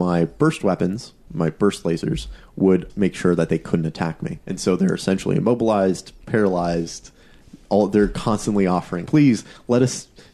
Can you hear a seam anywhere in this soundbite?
yes; 3 cuts; at 2.9 s, 4.4 s, 9.1 s

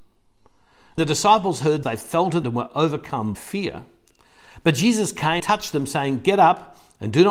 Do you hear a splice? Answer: yes; 5 cuts; at 1.0 s, 1.8 s, 2.4 s, 3.3 s, 5.4 s

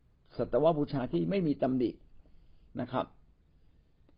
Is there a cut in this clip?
no; 0 cuts

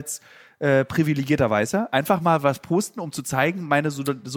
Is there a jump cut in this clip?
no; 0 cuts

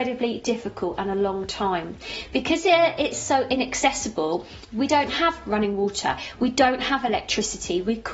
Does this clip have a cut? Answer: no; 0 cuts

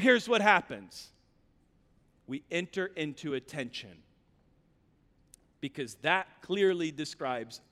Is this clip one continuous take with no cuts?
yes; 0 cuts

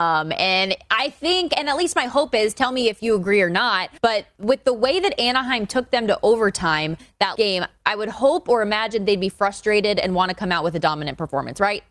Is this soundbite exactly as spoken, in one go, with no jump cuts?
no; 2 cuts; at 4.0 s, 7.3 s

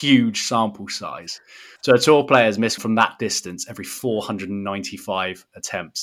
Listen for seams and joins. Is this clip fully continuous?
no; 2 cuts; at 1.8 s, 2.8 s

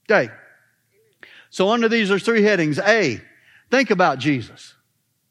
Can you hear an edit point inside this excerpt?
no; 0 cuts

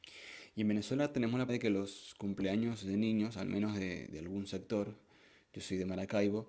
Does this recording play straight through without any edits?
no; 2 cuts; at 1.5 s, 4.1 s

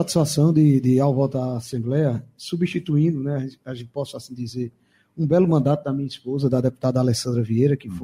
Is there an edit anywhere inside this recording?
no; 0 cuts

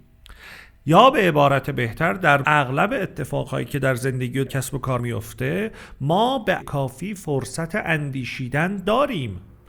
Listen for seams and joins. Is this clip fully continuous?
no; 4 cuts; at 2.4 s, 4.5 s, 5.0 s, 6.6 s

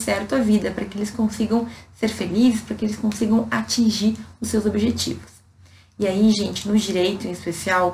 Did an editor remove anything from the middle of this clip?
no; 0 cuts

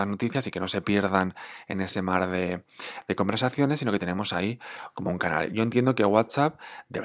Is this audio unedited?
yes; 0 cuts

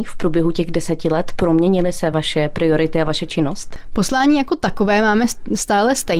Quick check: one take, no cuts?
yes; 0 cuts

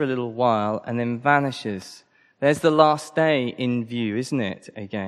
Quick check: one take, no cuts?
yes; 0 cuts

